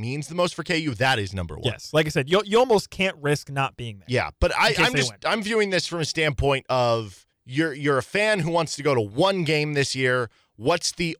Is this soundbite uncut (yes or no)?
no